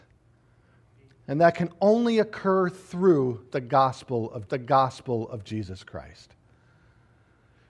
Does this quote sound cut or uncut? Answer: cut